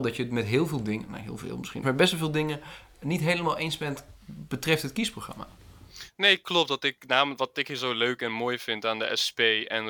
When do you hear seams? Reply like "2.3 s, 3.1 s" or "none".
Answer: 1.8 s, 7.5 s

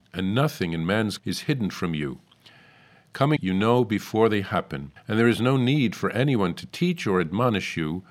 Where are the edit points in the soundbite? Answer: 1.2 s, 3.4 s, 5.0 s

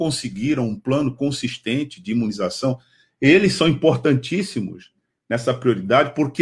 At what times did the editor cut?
none

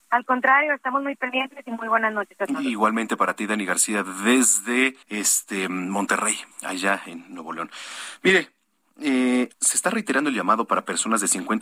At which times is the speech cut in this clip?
5.0 s, 6.5 s, 9.5 s

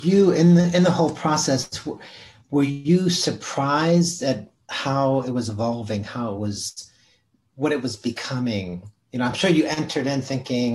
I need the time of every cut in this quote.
none

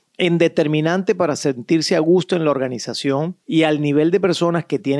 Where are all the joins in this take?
3.4 s

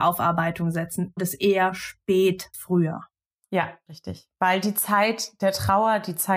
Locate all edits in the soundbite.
1.2 s, 2.5 s, 3.9 s

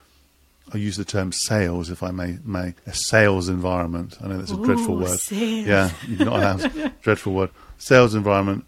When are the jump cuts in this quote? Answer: 2.8 s

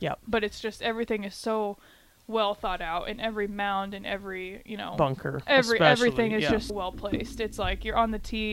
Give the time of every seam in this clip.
6.7 s

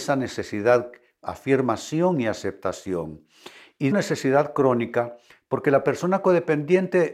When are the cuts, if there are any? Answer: 1.2 s, 3.9 s

